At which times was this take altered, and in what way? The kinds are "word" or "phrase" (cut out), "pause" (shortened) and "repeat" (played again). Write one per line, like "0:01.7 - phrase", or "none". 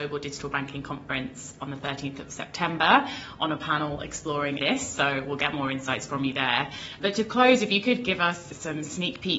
0:04.6 - word